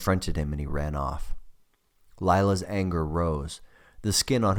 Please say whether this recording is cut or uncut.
uncut